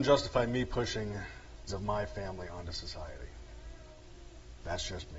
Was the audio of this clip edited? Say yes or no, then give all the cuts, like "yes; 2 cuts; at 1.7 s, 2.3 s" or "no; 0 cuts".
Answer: yes; 1 cut; at 1.7 s